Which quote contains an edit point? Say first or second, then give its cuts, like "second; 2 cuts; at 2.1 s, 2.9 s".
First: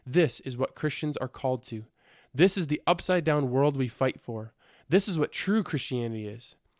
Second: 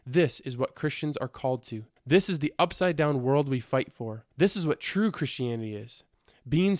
second; 2 cuts; at 2.0 s, 4.3 s